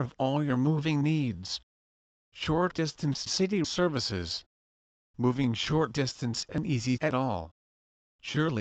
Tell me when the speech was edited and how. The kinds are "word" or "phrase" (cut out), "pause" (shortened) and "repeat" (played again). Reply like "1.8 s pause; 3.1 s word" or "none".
3.3 s word; 3.6 s word; 6.5 s word; 7.0 s word